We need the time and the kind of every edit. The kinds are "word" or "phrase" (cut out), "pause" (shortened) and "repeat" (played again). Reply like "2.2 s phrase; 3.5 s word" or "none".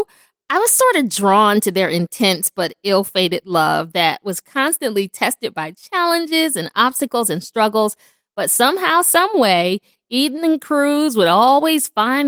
none